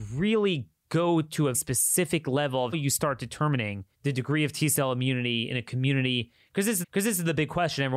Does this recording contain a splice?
yes; 4 cuts; at 1.5 s, 2.7 s, 3.9 s, 6.8 s

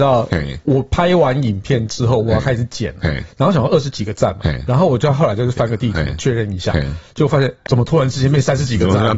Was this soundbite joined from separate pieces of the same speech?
yes; 1 cut; at 7.7 s

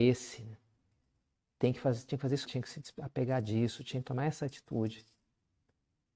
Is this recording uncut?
no; 1 cut; at 2.4 s

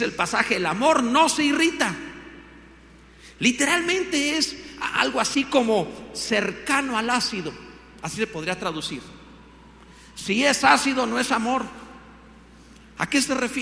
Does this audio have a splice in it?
no; 0 cuts

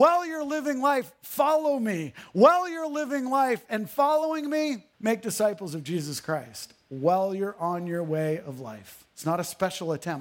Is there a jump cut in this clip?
yes; 2 cuts; at 4.9 s, 9.1 s

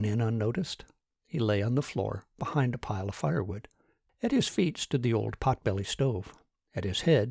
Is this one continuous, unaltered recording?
yes; 0 cuts

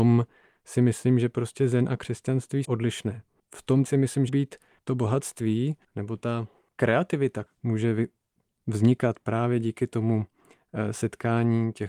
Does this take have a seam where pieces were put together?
yes; 4 cuts; at 2.6 s, 3.9 s, 4.3 s, 7.5 s

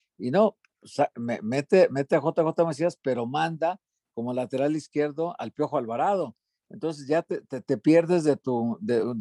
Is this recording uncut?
yes; 0 cuts

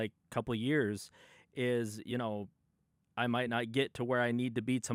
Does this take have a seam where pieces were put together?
no; 0 cuts

